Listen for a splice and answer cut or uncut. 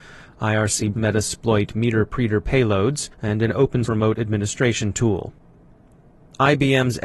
cut